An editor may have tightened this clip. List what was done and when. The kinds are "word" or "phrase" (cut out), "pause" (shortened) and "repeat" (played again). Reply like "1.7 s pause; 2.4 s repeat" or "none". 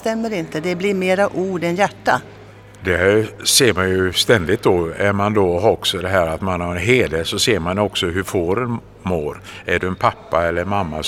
none